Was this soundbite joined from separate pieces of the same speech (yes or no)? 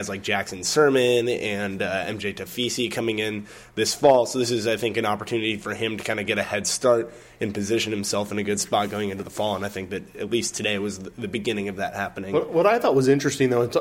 no